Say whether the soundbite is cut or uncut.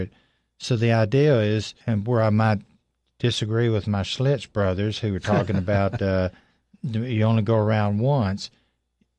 cut